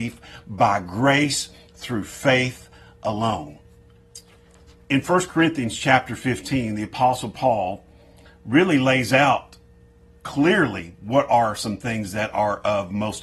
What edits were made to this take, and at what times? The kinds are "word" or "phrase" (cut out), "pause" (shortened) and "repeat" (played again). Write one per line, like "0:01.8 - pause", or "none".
none